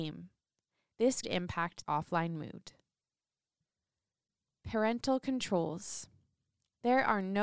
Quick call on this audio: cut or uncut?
cut